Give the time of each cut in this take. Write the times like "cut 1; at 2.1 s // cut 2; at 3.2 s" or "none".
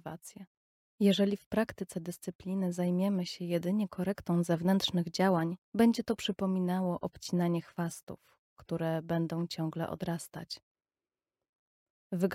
cut 1; at 5.6 s